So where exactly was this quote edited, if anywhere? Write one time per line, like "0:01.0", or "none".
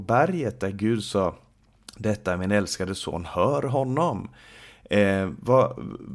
none